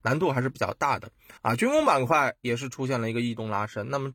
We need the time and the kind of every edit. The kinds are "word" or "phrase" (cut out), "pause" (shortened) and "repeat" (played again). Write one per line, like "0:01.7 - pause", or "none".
0:01.4 - pause